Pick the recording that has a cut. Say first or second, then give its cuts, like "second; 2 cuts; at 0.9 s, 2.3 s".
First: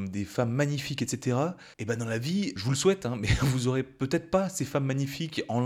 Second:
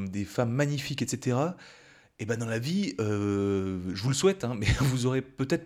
first; 2 cuts; at 1.7 s, 2.6 s